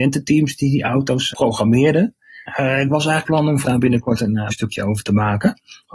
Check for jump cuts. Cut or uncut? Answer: cut